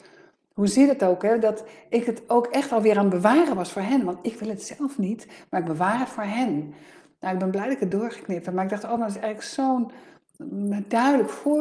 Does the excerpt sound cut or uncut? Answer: uncut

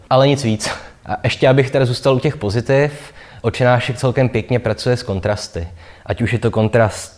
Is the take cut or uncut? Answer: uncut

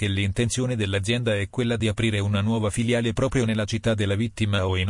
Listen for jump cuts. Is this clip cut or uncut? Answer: uncut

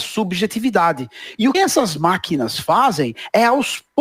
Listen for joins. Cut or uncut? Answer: cut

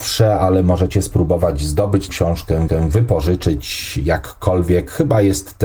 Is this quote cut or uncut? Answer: cut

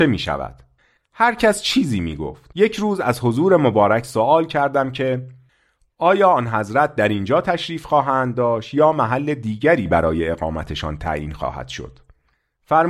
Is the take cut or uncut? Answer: cut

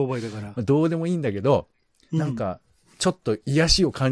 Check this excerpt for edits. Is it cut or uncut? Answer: uncut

